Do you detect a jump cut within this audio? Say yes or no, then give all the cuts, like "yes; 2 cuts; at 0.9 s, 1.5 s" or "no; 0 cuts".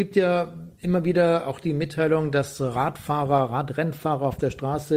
no; 0 cuts